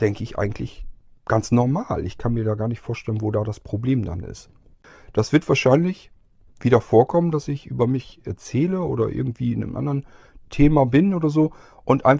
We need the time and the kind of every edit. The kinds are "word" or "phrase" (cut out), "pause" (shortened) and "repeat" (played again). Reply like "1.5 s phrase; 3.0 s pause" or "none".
none